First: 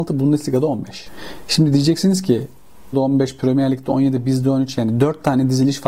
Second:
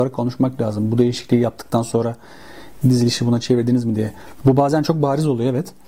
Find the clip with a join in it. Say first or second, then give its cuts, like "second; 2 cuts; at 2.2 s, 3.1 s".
first; 1 cut; at 2.9 s